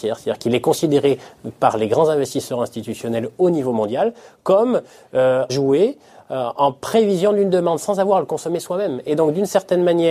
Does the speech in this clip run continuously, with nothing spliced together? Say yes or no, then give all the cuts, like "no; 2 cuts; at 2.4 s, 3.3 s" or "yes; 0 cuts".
no; 1 cut; at 5.5 s